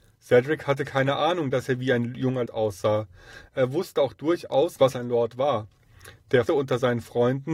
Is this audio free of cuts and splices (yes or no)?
no